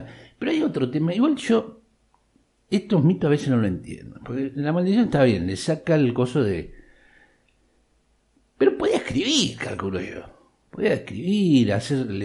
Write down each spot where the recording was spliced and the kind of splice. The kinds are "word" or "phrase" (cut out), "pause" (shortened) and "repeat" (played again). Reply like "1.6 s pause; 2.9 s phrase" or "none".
none